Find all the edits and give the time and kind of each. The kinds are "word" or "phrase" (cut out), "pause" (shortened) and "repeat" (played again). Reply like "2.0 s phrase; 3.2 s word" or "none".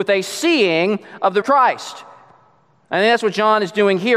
1.4 s word

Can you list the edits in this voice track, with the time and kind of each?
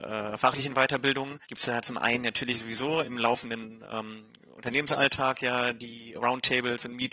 1.4 s pause

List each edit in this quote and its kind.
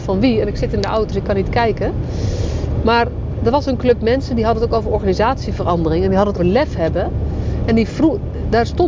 1.1 s word; 6.4 s word

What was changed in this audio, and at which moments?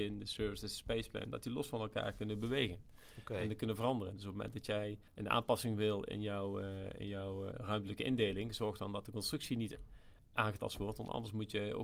5.1 s pause; 7.5 s word

